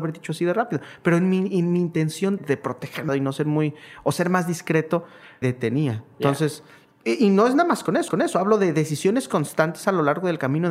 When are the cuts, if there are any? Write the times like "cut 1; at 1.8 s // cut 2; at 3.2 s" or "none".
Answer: cut 1; at 2.4 s // cut 2; at 3.1 s // cut 3; at 5.4 s // cut 4; at 8.1 s